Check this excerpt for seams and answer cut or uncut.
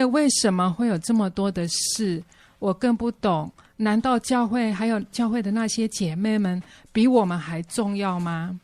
uncut